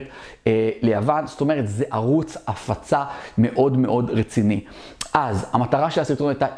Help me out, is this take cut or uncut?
uncut